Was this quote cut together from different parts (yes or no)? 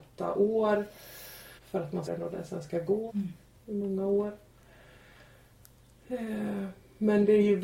yes